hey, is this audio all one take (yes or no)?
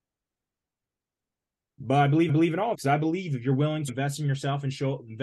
no